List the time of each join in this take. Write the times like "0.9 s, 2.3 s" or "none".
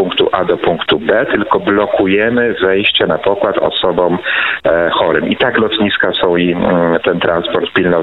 none